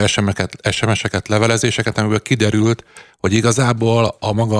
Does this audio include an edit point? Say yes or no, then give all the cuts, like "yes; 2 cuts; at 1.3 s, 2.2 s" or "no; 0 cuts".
no; 0 cuts